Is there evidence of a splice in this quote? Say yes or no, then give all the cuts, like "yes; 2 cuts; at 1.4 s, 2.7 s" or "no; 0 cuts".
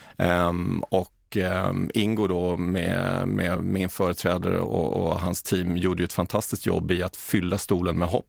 no; 0 cuts